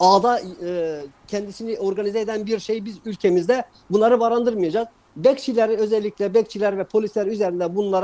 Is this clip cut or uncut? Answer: uncut